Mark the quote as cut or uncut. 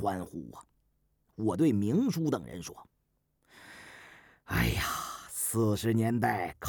uncut